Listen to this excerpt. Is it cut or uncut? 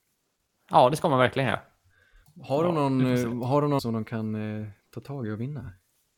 cut